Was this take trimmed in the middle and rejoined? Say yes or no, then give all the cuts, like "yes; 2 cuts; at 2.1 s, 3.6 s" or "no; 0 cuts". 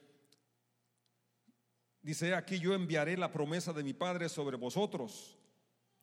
no; 0 cuts